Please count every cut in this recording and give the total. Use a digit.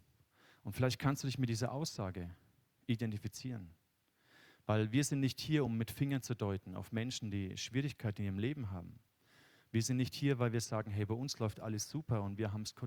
0